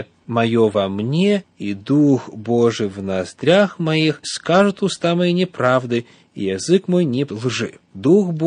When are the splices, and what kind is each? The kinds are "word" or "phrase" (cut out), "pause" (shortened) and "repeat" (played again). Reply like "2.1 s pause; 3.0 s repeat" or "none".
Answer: 4.2 s word; 7.3 s word